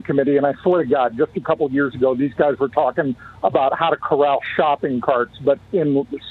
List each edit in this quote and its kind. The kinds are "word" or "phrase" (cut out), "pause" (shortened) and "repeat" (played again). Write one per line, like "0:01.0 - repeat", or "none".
none